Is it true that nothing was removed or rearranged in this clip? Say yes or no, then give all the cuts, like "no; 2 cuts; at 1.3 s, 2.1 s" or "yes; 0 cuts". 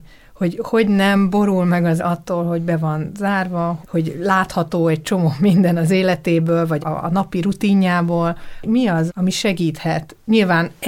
no; 4 cuts; at 2.0 s, 3.8 s, 6.8 s, 9.1 s